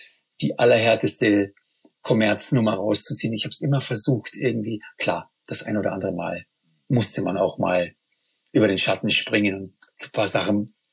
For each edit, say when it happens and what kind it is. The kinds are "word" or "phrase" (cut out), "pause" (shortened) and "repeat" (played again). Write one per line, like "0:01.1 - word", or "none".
none